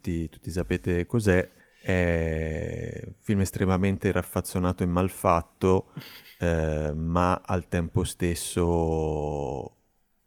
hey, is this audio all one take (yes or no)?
no